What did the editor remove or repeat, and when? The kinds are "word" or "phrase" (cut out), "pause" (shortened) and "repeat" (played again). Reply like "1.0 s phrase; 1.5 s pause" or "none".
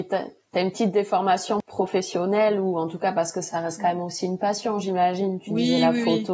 none